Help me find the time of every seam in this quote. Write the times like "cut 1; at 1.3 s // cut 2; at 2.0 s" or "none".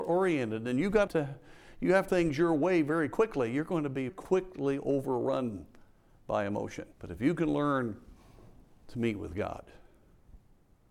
cut 1; at 1.1 s // cut 2; at 2.1 s // cut 3; at 4.1 s // cut 4; at 6.9 s

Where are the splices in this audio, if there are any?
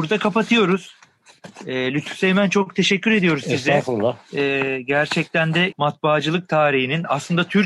cut 1; at 5.7 s

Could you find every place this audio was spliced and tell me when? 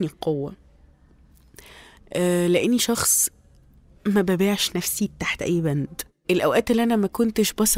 none

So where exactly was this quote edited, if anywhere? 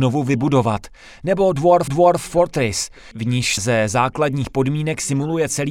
cut 1; at 1.9 s // cut 2; at 3.6 s

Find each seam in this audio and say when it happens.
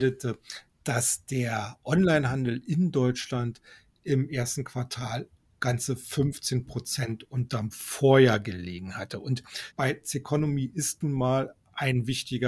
cut 1; at 9.7 s

